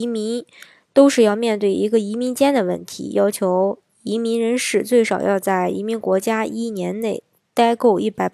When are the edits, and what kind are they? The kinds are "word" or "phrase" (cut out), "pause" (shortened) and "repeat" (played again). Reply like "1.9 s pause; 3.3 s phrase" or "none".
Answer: none